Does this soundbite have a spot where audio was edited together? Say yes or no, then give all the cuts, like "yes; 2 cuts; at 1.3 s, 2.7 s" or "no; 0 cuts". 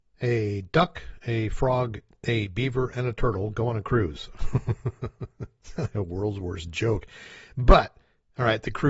no; 0 cuts